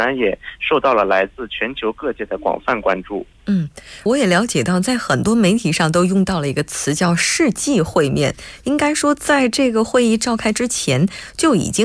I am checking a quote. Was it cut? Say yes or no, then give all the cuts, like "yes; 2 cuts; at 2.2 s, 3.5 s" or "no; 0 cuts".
yes; 1 cut; at 4.1 s